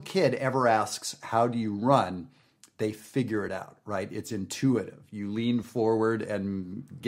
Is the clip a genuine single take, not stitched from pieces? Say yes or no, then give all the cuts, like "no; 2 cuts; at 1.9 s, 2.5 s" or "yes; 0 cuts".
yes; 0 cuts